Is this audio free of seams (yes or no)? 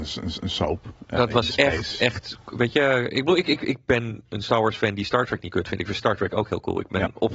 yes